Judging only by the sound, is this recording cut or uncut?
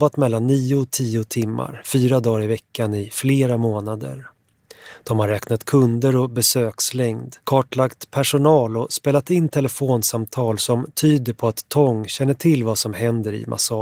cut